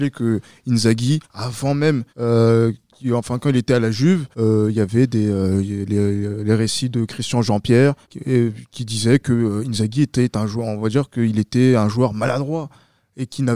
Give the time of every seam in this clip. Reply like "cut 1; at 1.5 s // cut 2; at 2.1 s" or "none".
cut 1; at 1.2 s // cut 2; at 2.1 s // cut 3; at 4.3 s // cut 4; at 8.0 s